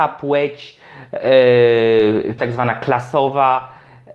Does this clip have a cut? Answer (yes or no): yes